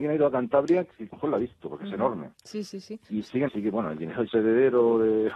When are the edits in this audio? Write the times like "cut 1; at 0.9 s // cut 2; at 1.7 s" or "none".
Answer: cut 1; at 1.1 s // cut 2; at 2.3 s // cut 3; at 3.0 s // cut 4; at 3.5 s // cut 5; at 4.3 s